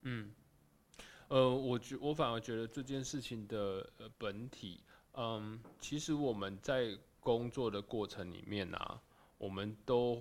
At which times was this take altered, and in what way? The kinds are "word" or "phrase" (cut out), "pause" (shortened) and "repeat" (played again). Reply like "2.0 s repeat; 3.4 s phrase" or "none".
none